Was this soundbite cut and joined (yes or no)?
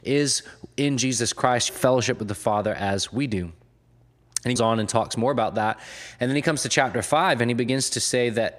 yes